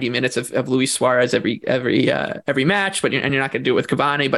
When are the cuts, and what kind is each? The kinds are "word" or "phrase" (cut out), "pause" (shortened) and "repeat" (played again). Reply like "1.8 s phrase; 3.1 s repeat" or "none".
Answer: none